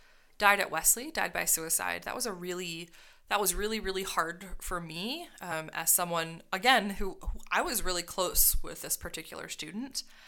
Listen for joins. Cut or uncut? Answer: uncut